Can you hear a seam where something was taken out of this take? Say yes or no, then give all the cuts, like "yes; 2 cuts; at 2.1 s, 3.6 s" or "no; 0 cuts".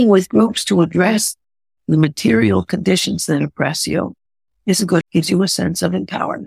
yes; 2 cuts; at 4.3 s, 5.0 s